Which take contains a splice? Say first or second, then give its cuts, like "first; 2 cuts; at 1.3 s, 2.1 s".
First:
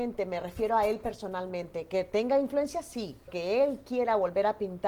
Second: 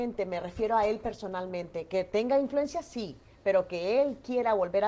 first; 1 cut; at 3.3 s